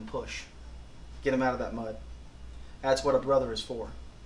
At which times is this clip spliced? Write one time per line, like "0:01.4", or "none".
none